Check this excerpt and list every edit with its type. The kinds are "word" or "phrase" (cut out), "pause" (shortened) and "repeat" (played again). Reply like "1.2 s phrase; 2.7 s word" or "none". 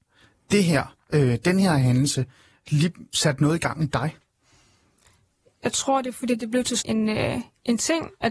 6.8 s word